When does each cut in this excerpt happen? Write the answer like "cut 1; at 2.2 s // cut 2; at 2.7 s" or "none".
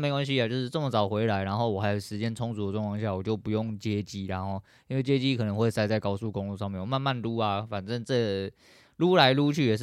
none